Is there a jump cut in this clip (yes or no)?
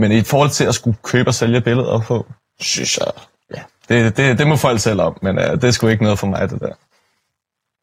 yes